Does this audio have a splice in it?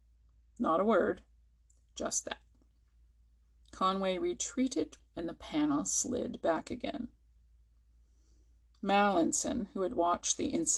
yes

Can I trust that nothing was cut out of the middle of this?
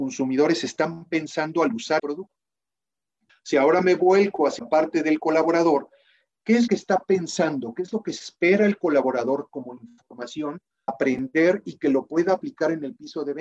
no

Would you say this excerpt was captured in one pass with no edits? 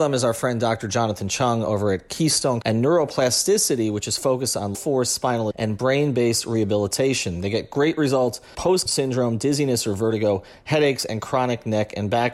no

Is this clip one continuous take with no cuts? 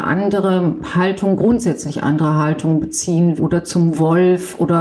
no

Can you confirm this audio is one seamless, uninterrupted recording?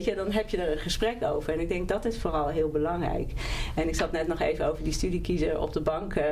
yes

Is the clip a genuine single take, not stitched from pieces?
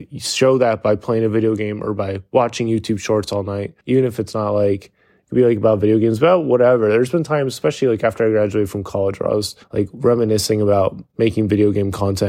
no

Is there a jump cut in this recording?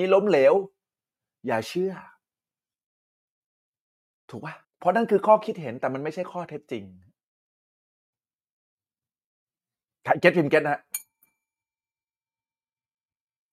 yes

